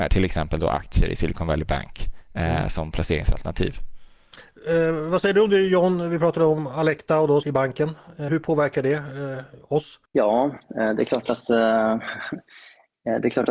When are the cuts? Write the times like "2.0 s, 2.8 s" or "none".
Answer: 7.4 s, 8.3 s, 10.0 s